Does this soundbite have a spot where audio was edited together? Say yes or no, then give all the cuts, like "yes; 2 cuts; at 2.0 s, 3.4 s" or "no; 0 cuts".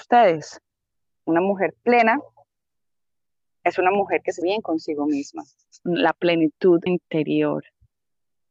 yes; 3 cuts; at 4.4 s, 5.7 s, 6.9 s